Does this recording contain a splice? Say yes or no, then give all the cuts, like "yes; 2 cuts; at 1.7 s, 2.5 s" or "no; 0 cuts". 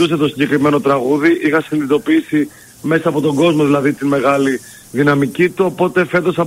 no; 0 cuts